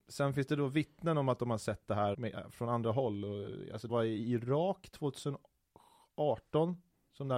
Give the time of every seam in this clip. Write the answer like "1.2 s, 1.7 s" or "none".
2.1 s, 3.9 s